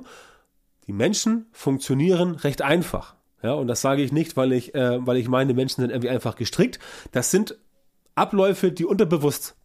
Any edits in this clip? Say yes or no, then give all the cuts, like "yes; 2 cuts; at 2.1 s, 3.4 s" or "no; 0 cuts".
no; 0 cuts